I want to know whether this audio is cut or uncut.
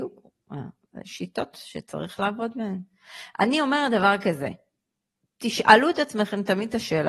uncut